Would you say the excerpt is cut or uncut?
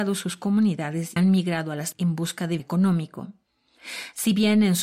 cut